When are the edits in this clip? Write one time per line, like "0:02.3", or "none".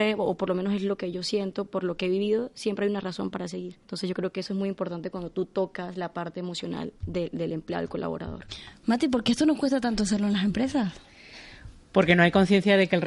0:03.8
0:07.0